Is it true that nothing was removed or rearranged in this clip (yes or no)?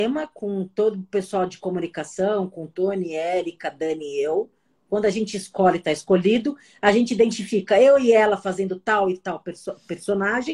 yes